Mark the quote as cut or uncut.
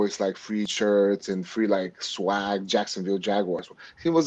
uncut